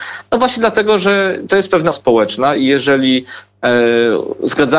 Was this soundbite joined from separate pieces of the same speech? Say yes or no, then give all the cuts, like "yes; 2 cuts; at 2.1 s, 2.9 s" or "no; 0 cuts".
yes; 1 cut; at 1.9 s